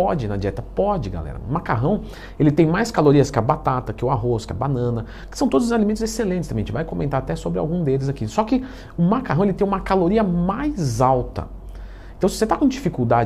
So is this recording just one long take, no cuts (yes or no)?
yes